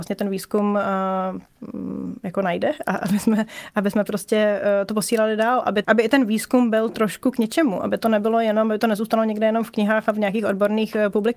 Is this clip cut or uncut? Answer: cut